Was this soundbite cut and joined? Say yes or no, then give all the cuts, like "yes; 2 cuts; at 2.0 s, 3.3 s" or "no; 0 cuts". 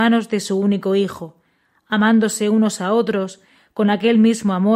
no; 0 cuts